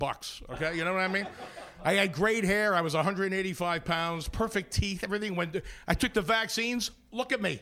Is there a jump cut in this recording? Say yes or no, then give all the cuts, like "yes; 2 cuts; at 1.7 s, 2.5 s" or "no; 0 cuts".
no; 0 cuts